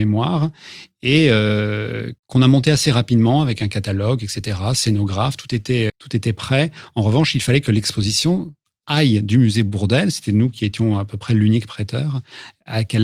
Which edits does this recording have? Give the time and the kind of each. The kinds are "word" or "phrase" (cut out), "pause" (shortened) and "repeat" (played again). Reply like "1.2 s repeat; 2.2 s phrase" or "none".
2.2 s pause; 5.9 s word